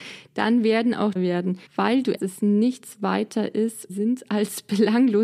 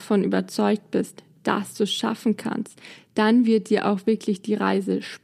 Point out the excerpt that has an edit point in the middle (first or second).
first